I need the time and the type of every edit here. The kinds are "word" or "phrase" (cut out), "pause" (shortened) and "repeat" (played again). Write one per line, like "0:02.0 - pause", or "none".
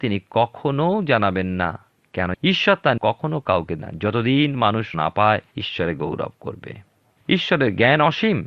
0:02.3 - word
0:03.0 - phrase
0:03.8 - word
0:04.9 - word
0:05.5 - pause

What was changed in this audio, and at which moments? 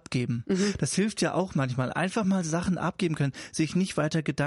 none

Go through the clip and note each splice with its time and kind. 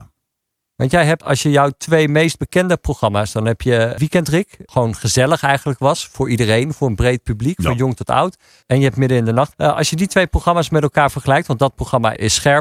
0:01.2 - word
0:09.5 - word

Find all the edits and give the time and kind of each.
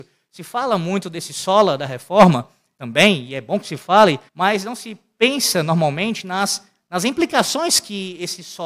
0:04.3 - pause

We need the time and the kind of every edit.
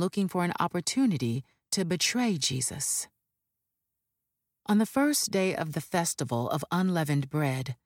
none

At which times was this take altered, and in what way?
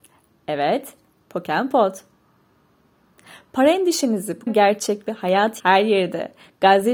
0:04.5 - word
0:05.6 - word

